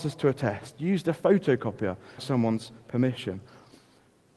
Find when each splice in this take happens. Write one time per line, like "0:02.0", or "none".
0:02.2